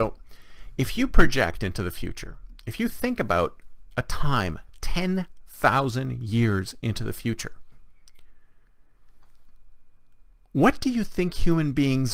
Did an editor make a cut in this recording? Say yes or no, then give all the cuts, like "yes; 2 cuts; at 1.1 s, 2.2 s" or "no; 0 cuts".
no; 0 cuts